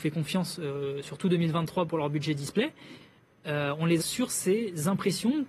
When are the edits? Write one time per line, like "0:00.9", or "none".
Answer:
0:04.0